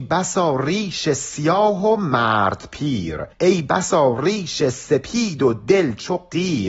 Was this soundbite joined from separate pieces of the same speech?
yes; 1 cut; at 3.3 s

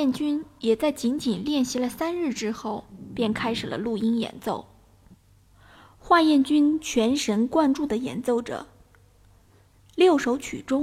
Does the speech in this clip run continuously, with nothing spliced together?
no; 1 cut; at 5.1 s

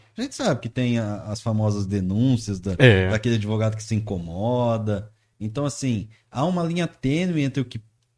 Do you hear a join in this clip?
no; 0 cuts

